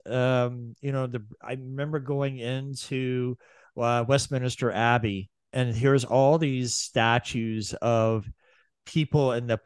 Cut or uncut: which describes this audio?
uncut